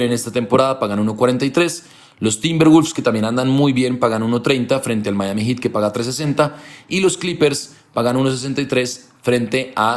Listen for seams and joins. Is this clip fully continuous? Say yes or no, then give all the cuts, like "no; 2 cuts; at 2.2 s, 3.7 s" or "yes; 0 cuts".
yes; 0 cuts